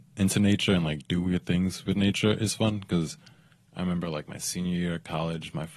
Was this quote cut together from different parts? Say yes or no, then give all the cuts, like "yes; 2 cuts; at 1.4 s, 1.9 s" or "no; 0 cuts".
no; 0 cuts